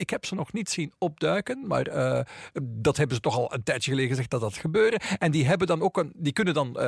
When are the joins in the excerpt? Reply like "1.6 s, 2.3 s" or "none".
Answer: none